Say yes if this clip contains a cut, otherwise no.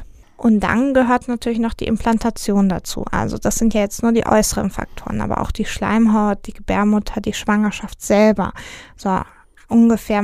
no